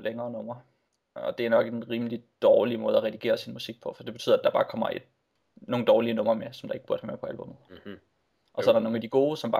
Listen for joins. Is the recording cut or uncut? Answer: uncut